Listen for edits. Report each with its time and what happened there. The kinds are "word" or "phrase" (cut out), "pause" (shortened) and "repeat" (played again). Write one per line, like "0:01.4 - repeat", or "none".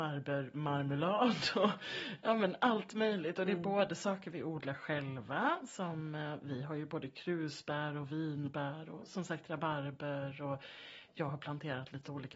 none